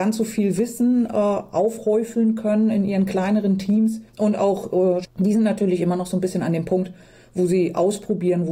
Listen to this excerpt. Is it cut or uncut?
cut